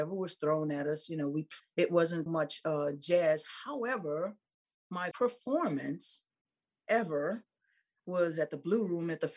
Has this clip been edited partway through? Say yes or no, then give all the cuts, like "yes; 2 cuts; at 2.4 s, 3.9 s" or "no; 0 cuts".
yes; 3 cuts; at 1.6 s, 2.3 s, 5.1 s